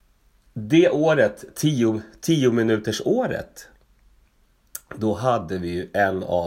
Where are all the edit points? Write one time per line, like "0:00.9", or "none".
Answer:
none